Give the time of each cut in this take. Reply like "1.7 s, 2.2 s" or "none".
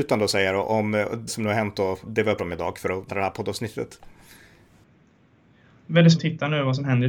1.3 s, 2.0 s, 2.4 s, 3.1 s, 6.1 s